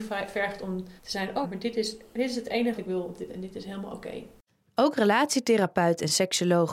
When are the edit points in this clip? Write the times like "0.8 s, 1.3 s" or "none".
1.0 s, 1.4 s, 2.8 s, 3.3 s, 4.4 s